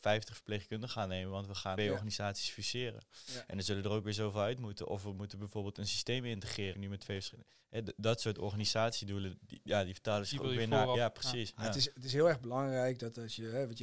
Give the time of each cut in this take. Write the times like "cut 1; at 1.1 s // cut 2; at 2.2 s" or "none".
cut 1; at 1.8 s // cut 2; at 6.7 s